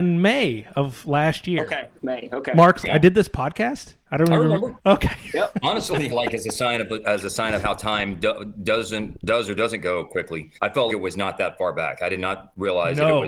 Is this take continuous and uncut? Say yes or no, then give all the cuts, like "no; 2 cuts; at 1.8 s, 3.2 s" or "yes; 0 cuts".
no; 6 cuts; at 2.0 s, 2.8 s, 4.0 s, 6.1 s, 10.6 s, 10.9 s